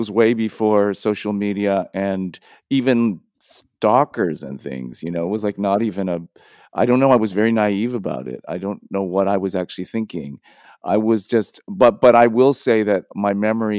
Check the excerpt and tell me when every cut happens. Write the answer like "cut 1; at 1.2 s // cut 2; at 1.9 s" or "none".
none